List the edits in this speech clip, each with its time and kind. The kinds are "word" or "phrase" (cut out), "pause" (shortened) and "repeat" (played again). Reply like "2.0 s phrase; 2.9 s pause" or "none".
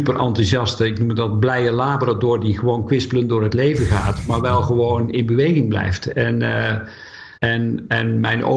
7.4 s pause